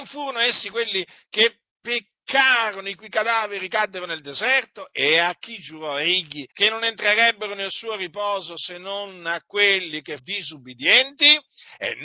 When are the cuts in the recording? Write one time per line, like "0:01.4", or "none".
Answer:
0:01.7
0:06.5
0:10.2